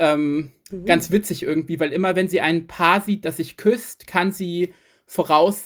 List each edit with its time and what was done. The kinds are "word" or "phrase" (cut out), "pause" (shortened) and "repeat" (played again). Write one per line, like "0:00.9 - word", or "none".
none